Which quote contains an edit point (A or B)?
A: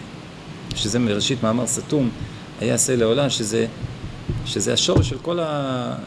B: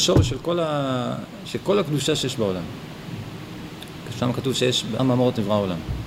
B